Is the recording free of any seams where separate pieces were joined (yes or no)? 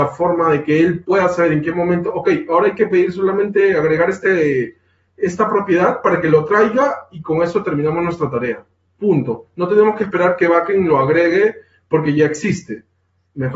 yes